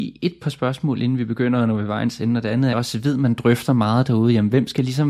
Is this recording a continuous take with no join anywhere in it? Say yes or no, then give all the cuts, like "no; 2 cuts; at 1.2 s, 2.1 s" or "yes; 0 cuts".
no; 1 cut; at 2.7 s